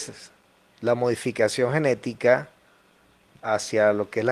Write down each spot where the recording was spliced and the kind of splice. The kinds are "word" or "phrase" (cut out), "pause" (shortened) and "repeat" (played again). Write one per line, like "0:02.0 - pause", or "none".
none